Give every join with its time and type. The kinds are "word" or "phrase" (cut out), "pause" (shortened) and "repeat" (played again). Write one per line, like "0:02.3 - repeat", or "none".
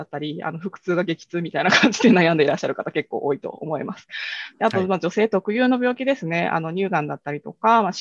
none